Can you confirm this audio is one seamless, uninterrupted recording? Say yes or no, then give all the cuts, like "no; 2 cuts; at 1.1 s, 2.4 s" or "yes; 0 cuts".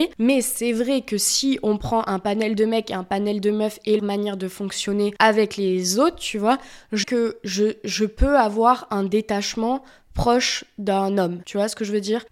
no; 2 cuts; at 4.0 s, 7.0 s